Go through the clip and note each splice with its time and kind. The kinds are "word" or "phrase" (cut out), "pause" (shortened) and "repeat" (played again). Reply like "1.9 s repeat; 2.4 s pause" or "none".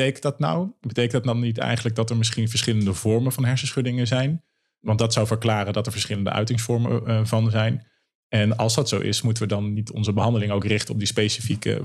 none